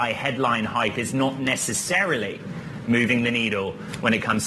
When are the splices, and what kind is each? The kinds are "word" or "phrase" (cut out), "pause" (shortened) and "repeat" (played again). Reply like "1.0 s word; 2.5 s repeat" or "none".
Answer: none